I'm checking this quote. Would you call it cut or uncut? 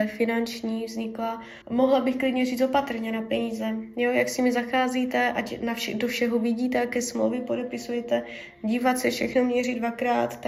cut